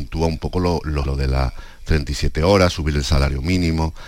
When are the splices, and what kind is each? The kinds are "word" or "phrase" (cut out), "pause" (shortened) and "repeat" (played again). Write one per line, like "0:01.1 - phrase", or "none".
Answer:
0:01.1 - word